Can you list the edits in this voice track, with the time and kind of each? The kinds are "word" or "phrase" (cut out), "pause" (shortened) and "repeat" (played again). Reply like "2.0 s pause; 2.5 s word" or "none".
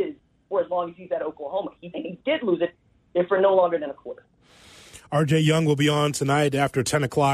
1.9 s phrase

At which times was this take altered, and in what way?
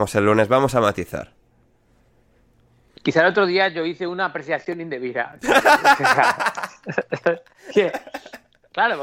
none

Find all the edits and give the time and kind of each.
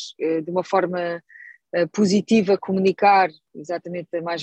none

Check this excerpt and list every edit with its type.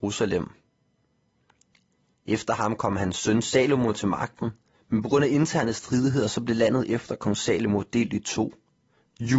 4.7 s pause

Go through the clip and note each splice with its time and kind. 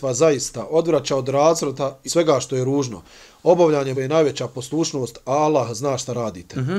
2.1 s word; 3.9 s word

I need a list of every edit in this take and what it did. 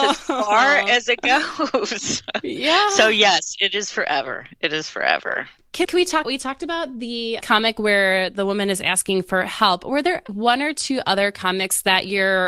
5.8 s word; 6.2 s word; 7.4 s word; 10.3 s word

